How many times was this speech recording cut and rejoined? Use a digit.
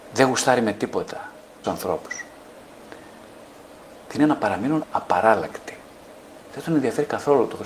3